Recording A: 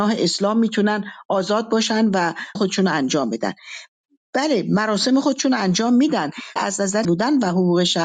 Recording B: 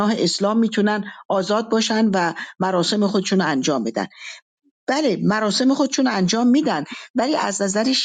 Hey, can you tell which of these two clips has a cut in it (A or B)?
A